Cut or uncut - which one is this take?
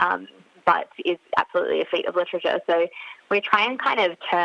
uncut